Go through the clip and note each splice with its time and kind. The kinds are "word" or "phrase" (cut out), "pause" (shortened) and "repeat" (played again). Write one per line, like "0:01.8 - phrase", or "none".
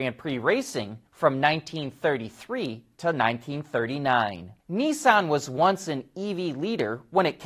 0:01.1 - pause
0:04.6 - pause